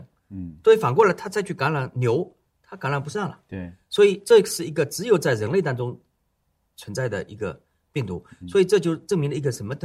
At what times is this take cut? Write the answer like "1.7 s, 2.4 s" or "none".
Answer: 2.5 s